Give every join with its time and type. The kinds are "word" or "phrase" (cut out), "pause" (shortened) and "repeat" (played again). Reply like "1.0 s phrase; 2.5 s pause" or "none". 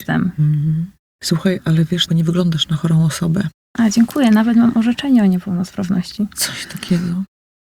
2.1 s phrase